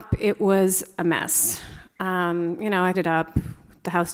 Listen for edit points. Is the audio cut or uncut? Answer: cut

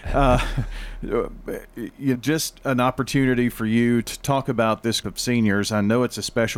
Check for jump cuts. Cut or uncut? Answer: cut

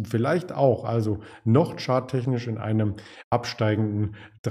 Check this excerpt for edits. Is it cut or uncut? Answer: uncut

